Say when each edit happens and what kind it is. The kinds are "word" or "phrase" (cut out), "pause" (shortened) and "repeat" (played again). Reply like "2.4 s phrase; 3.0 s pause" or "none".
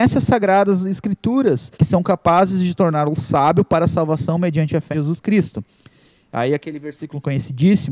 1.7 s pause; 4.9 s word